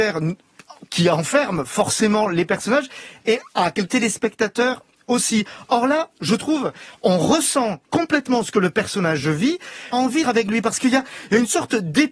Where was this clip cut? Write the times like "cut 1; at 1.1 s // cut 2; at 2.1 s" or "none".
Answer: cut 1; at 3.9 s // cut 2; at 7.8 s // cut 3; at 9.9 s // cut 4; at 10.2 s